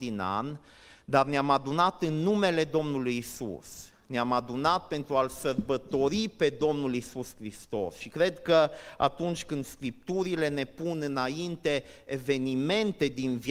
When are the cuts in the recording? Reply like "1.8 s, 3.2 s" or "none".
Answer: none